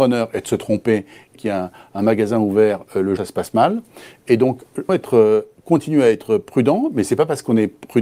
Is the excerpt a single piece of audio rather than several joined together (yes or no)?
no